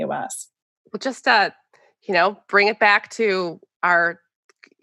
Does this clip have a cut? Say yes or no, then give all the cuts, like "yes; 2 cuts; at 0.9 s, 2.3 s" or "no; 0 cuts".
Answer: no; 0 cuts